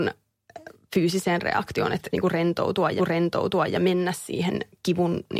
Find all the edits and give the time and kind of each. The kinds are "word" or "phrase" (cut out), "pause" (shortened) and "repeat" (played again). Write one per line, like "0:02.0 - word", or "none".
0:02.1 - word
0:03.0 - repeat